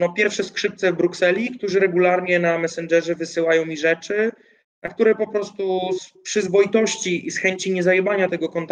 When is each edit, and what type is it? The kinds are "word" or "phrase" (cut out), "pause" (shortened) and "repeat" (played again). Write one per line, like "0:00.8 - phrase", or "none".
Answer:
none